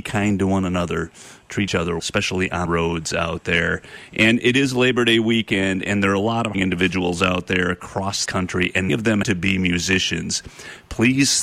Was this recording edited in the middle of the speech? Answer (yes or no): yes